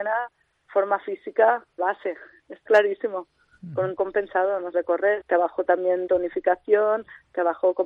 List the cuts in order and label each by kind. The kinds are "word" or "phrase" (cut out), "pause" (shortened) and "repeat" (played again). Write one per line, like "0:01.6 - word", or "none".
0:01.8 - word
0:02.7 - word
0:04.0 - word
0:04.7 - word
0:05.2 - word
0:06.1 - word